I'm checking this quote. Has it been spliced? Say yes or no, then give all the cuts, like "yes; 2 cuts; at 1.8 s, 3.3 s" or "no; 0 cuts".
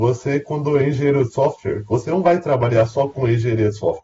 no; 0 cuts